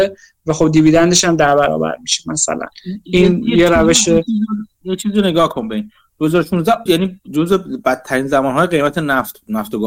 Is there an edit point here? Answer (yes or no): yes